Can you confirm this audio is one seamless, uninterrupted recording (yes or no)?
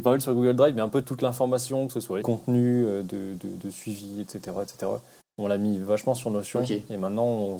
no